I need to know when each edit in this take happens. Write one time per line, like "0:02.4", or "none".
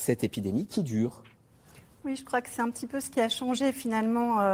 none